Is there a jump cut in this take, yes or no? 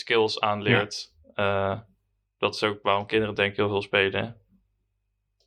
no